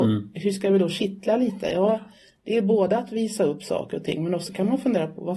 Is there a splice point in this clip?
no; 0 cuts

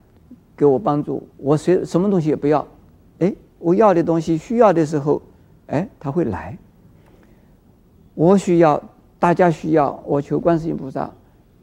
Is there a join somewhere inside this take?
yes; 1 cut; at 1.3 s

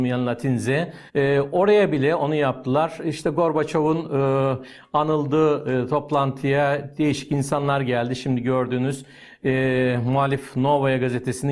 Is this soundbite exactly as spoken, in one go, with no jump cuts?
no; 1 cut; at 1.1 s

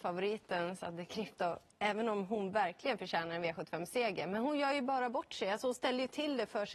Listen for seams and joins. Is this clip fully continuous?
yes; 0 cuts

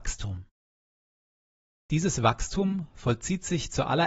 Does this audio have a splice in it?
no; 0 cuts

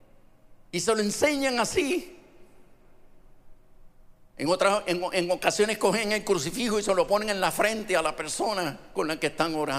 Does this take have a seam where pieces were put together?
no; 0 cuts

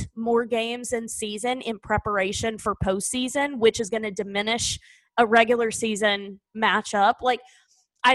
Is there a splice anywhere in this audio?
no; 0 cuts

